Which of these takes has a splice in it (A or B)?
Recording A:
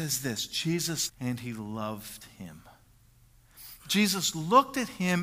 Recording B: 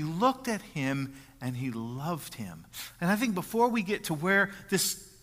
A